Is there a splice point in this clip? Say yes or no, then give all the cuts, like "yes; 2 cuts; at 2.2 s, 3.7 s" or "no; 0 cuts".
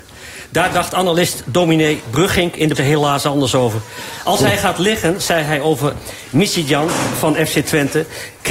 yes; 1 cut; at 2.8 s